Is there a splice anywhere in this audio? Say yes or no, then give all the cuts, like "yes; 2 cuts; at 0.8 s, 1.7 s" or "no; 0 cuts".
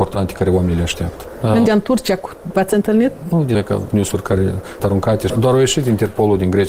yes; 5 cuts; at 1.7 s, 2.5 s, 3.5 s, 3.9 s, 4.8 s